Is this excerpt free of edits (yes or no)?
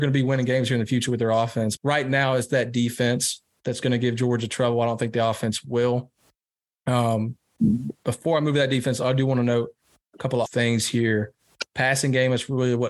no